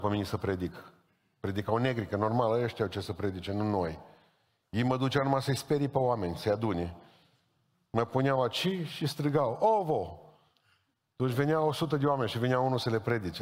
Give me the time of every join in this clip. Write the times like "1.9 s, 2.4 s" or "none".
none